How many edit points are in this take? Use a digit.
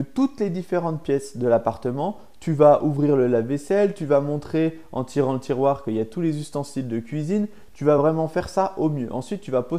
0